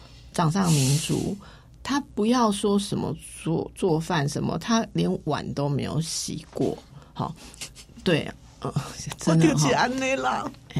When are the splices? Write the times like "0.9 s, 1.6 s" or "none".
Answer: none